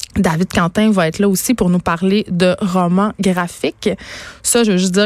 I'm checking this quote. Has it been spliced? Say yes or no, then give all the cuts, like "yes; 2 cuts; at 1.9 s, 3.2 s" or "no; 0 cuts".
no; 0 cuts